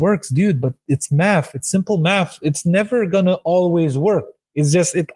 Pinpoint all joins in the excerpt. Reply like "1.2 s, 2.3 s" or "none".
none